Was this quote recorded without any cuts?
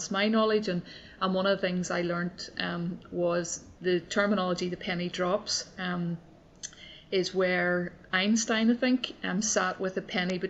no; 1 cut; at 3.8 s

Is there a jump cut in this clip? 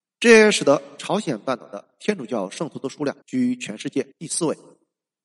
yes; 2 cuts; at 3.2 s, 4.1 s

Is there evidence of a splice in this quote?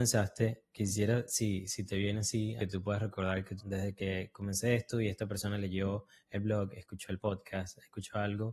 yes; 2 cuts; at 2.6 s, 3.6 s

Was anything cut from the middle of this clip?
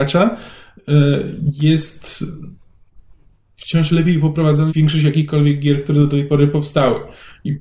yes; 1 cut; at 4.7 s

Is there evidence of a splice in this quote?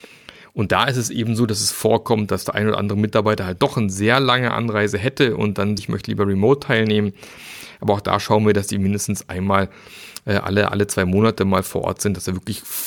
yes; 1 cut; at 5.8 s

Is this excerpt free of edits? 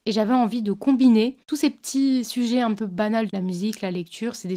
no; 3 cuts; at 1.4 s, 2.8 s, 3.3 s

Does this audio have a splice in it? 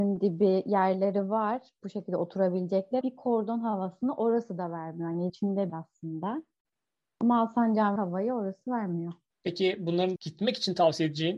yes; 5 cuts; at 3.0 s, 5.3 s, 5.7 s, 8.0 s, 10.2 s

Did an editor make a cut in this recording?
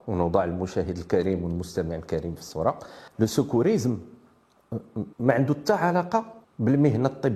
yes; 3 cuts; at 3.1 s, 5.1 s, 6.4 s

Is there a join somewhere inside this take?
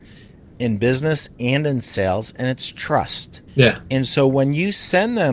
yes; 1 cut; at 3.5 s

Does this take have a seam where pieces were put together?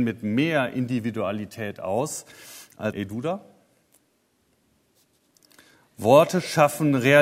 yes; 1 cut; at 2.9 s

